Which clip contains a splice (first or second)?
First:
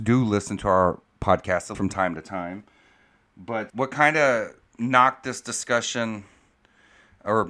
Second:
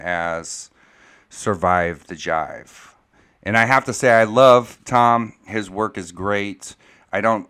first